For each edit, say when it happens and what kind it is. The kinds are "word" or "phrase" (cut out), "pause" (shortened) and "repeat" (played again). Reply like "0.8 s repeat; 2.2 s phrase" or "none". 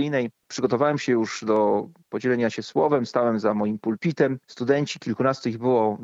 4.4 s pause